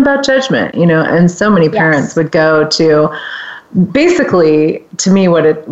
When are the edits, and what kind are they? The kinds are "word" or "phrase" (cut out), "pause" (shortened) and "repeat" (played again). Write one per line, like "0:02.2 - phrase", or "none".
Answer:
none